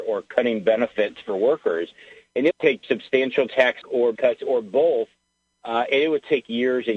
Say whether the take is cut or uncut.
cut